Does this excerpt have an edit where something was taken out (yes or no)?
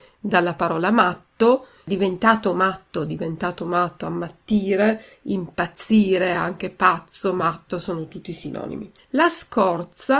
no